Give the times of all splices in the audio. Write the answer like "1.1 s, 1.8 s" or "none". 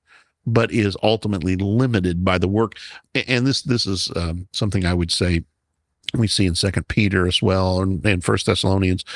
3.1 s